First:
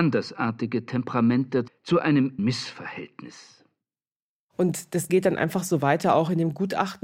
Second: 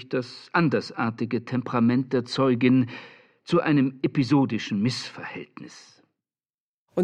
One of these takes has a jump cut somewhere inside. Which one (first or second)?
first